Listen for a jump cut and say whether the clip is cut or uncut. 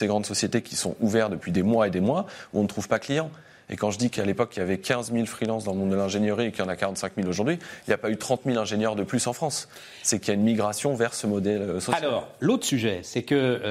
uncut